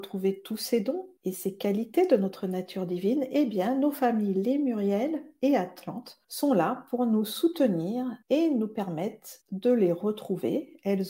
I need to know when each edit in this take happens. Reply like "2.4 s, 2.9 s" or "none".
1.2 s, 6.2 s, 8.2 s, 9.4 s